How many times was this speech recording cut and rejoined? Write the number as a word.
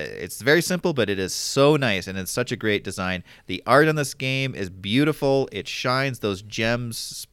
zero